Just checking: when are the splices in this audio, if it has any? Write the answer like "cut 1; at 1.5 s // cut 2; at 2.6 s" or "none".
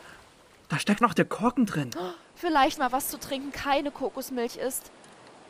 cut 1; at 1.0 s // cut 2; at 2.8 s // cut 3; at 3.5 s